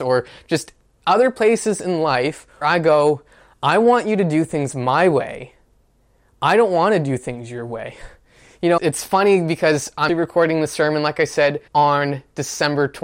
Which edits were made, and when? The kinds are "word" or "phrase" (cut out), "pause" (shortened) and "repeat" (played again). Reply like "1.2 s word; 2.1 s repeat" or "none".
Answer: 2.6 s word; 8.8 s word; 10.1 s word; 11.7 s pause